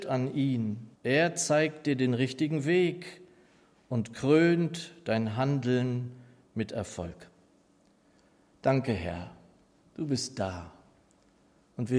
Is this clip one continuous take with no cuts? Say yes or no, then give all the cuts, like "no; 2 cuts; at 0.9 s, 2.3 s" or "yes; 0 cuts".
no; 1 cut; at 1.0 s